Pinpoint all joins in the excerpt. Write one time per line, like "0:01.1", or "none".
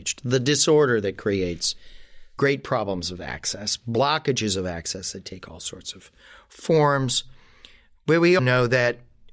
0:08.4